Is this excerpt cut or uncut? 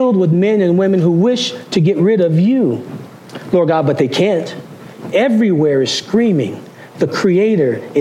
uncut